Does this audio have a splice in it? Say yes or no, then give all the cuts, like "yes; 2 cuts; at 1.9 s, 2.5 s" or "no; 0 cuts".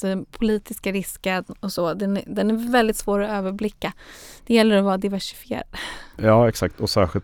no; 0 cuts